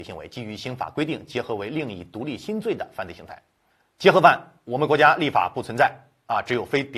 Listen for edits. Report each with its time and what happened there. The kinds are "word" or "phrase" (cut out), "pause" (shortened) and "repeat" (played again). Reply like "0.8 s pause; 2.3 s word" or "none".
3.7 s pause